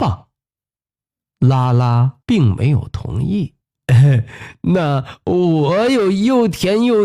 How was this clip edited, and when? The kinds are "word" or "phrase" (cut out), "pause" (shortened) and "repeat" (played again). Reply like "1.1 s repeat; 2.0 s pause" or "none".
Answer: 1.0 s pause; 2.2 s pause; 3.6 s pause